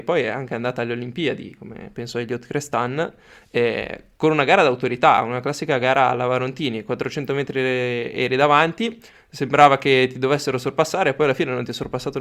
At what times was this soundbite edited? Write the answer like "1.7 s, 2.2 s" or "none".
none